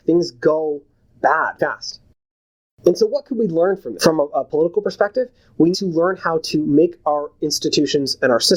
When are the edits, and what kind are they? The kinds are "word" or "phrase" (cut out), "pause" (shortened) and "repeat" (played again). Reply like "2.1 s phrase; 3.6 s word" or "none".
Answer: 1.6 s word; 4.0 s word; 5.7 s word